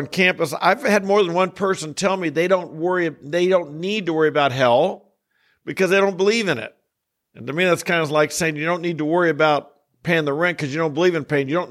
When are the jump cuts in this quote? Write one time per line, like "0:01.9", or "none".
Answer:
none